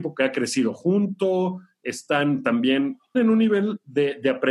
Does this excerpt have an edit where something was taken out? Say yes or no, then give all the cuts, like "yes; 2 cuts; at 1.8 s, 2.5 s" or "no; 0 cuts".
yes; 1 cut; at 3.1 s